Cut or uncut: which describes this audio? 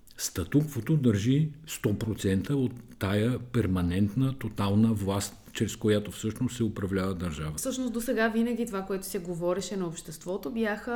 uncut